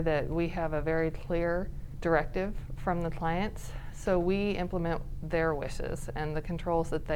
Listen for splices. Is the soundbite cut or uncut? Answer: uncut